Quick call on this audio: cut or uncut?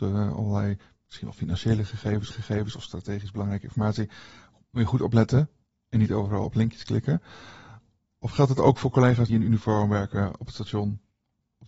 cut